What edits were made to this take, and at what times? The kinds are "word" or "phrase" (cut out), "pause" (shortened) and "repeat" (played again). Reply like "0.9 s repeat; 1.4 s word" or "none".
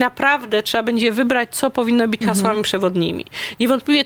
2.2 s word